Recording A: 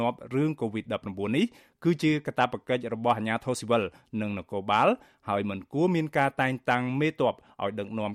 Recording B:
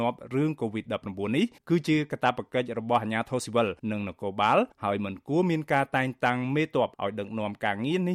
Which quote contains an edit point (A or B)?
B